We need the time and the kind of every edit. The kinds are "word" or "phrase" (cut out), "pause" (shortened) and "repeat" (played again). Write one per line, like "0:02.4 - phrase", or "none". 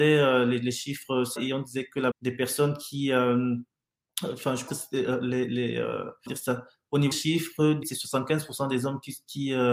0:01.4 - word
0:02.1 - word
0:04.7 - word
0:06.3 - word
0:07.1 - word
0:07.8 - word